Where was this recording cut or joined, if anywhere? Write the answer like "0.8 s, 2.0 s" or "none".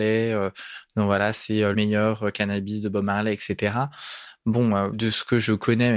1.7 s, 4.9 s